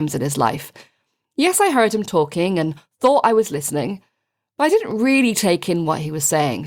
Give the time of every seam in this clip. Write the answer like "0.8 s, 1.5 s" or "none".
none